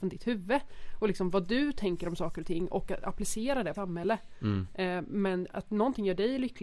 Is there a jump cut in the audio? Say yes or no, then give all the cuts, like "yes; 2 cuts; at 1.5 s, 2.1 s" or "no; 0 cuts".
yes; 1 cut; at 3.7 s